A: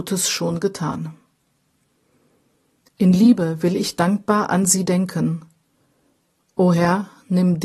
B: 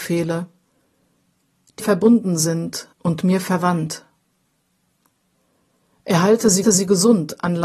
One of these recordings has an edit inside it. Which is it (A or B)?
B